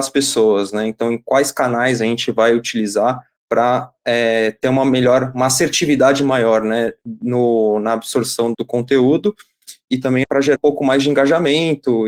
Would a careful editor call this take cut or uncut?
cut